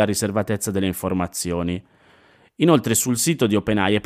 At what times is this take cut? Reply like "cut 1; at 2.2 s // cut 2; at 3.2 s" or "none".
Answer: none